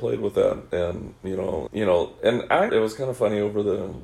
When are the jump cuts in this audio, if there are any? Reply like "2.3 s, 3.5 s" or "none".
1.7 s, 2.7 s

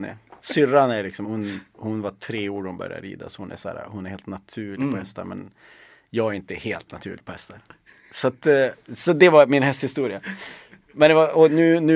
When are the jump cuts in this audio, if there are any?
1.2 s

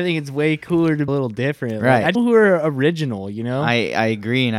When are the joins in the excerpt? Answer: 1.1 s, 2.1 s

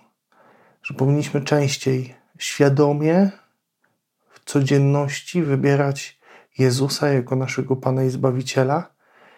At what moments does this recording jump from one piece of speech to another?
none

